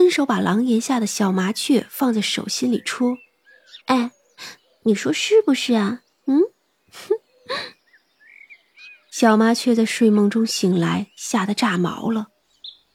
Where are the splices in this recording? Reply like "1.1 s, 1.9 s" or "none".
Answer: 3.8 s, 7.8 s